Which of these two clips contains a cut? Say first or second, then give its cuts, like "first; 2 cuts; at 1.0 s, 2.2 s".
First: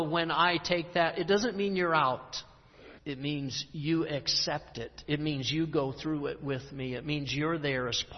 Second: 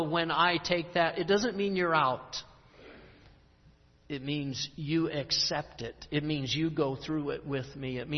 first; 1 cut; at 3.0 s